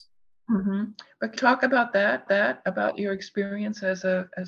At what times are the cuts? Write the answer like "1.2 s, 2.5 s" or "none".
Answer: 1.4 s, 2.3 s